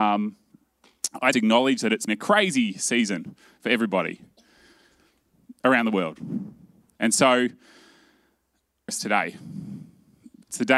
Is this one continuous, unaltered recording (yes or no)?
no